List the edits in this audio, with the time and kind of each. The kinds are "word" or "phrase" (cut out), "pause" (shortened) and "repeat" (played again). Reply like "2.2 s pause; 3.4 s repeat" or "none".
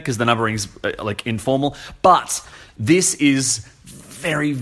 none